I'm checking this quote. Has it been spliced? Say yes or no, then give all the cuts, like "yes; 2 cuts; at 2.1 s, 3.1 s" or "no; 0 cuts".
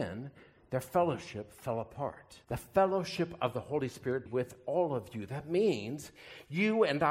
yes; 2 cuts; at 2.4 s, 4.3 s